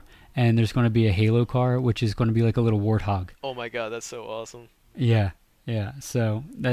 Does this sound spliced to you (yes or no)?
no